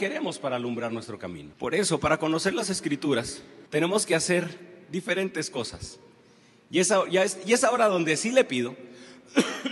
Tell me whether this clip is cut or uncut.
cut